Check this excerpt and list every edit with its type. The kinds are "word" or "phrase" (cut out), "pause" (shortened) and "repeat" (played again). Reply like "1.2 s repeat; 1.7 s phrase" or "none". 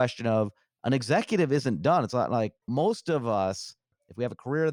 2.6 s pause

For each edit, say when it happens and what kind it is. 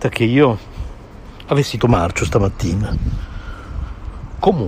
1.8 s word

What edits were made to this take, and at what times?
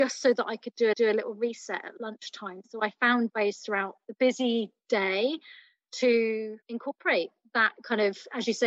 0.9 s repeat; 3.3 s word; 6.6 s pause

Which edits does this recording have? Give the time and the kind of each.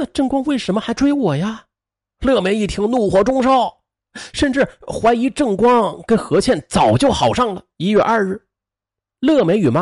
1.7 s pause; 7.7 s pause

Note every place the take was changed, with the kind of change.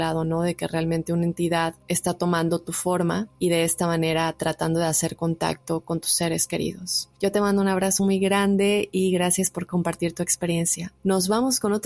none

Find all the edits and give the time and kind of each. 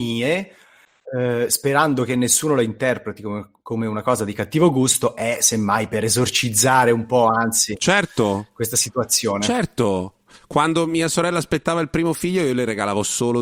none

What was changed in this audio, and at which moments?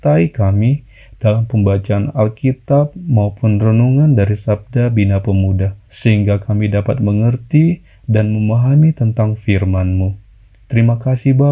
5.8 s pause

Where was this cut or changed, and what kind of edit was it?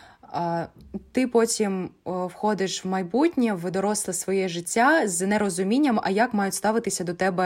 none

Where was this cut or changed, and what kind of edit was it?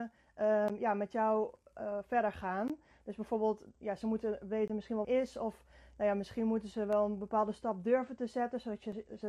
5.0 s phrase

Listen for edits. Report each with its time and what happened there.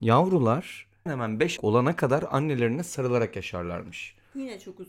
1.1 s word; 1.6 s word

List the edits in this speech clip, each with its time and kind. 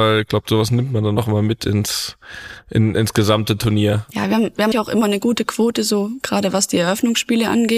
4.7 s word

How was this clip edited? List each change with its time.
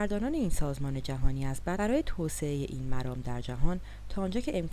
1.8 s phrase

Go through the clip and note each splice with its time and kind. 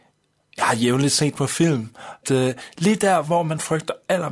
2.2 s word

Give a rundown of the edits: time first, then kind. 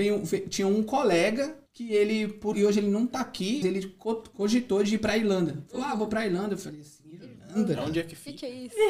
1.7 s pause; 2.5 s phrase; 3.6 s word

